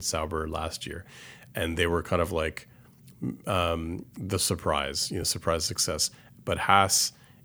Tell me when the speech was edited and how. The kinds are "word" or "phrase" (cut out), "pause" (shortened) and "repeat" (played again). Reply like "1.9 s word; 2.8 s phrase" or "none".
none